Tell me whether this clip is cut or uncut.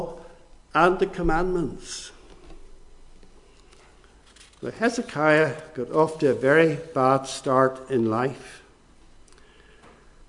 uncut